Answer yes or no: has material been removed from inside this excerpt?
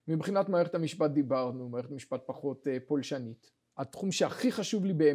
no